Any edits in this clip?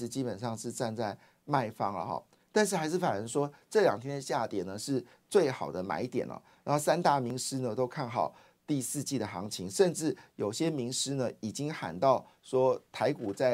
no; 0 cuts

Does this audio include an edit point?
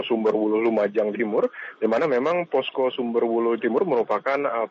yes; 2 cuts; at 1.1 s, 3.6 s

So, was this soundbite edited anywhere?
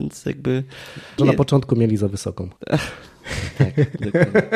yes; 2 cuts; at 1.2 s, 2.6 s

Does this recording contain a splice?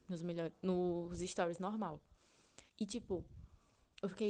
yes; 1 cut; at 2.7 s

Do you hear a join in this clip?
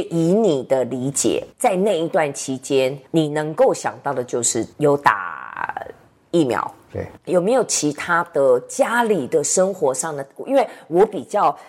yes; 4 cuts; at 1.5 s, 3.1 s, 4.7 s, 7.2 s

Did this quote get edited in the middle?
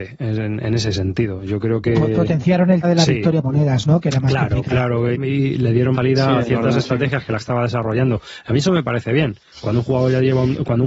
yes; 5 cuts; at 2.8 s, 3.4 s, 5.1 s, 5.9 s, 7.4 s

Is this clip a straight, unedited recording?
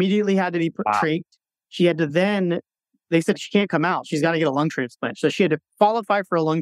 yes; 0 cuts

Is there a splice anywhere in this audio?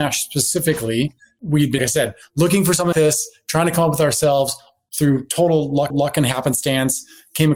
yes; 3 cuts; at 1.8 s, 2.9 s, 5.9 s

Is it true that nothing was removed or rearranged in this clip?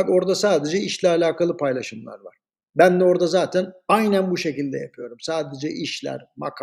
yes; 0 cuts

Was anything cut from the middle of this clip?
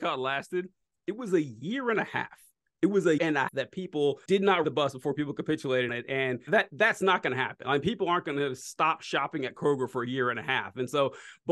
yes; 6 cuts; at 3.2 s, 3.5 s, 4.3 s, 4.6 s, 5.9 s, 6.5 s

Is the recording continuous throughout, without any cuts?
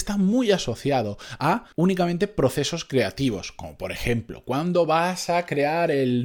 no; 1 cut; at 1.7 s

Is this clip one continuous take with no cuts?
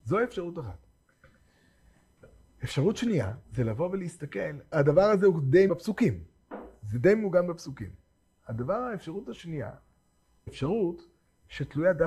no; 4 cuts; at 3.4 s, 4.7 s, 5.7 s, 10.5 s

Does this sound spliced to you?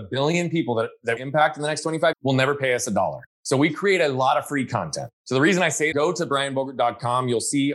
yes; 5 cuts; at 1.2 s, 2.1 s, 3.3 s, 5.2 s, 5.9 s

